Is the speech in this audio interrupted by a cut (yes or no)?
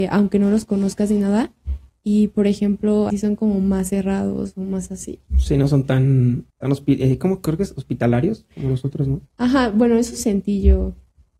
yes